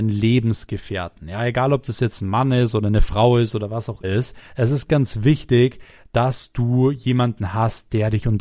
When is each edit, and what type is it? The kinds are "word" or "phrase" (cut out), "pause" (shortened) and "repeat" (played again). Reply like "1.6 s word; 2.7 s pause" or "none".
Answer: 4.0 s word; 4.5 s pause; 4.9 s word